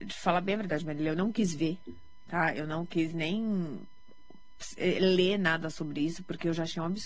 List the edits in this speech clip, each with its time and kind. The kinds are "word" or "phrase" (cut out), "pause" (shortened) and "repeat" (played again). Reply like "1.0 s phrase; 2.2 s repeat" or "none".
none